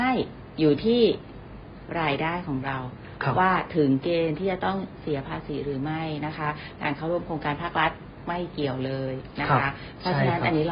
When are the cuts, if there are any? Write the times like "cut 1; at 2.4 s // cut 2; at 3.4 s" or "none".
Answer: none